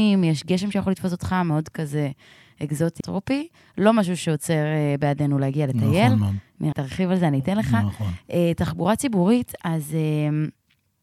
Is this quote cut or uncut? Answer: cut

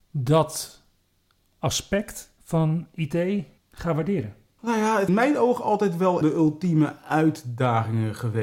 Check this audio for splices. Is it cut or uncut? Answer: cut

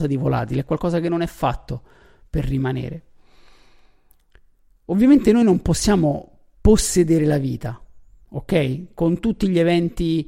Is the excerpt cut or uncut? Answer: uncut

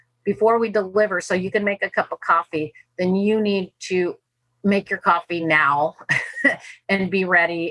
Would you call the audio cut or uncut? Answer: uncut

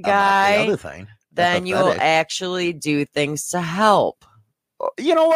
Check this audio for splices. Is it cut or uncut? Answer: uncut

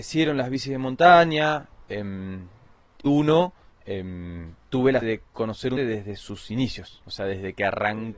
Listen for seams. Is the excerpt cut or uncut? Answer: cut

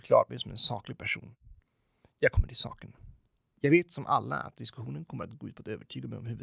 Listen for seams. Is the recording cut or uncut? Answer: uncut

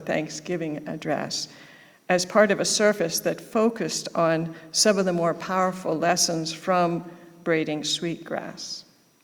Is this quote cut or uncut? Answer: uncut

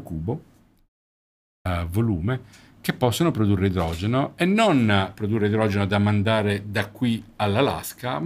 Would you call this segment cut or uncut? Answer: uncut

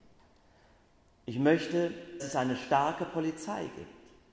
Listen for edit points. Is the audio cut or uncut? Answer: cut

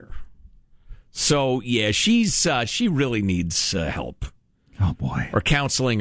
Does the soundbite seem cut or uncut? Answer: uncut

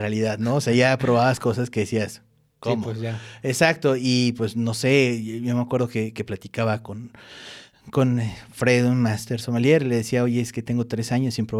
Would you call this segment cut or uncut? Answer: uncut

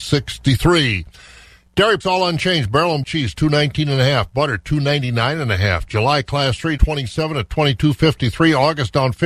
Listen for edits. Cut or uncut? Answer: cut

